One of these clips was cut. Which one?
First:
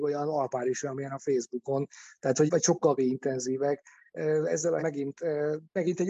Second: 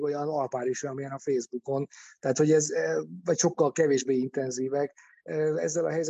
first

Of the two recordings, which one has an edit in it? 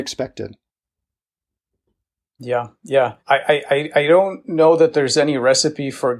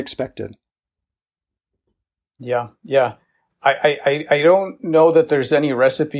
first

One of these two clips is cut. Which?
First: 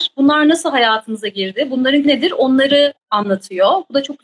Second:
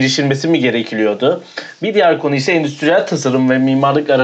first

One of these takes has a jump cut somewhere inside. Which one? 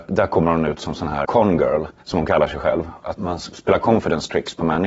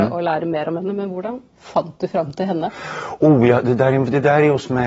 first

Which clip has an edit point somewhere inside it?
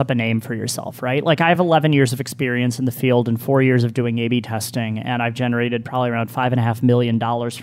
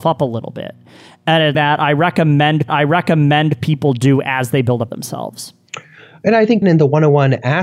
second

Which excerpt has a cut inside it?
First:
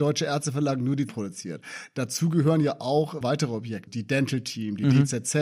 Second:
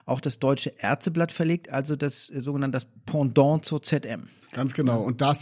first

